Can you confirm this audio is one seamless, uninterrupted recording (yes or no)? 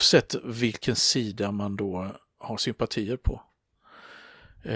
no